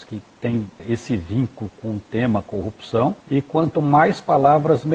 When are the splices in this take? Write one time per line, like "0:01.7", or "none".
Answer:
0:03.2